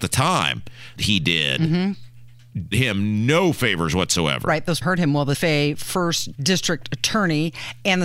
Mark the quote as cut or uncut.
cut